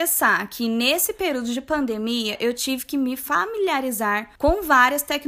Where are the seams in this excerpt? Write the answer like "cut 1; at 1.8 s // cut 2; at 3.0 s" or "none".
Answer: cut 1; at 4.4 s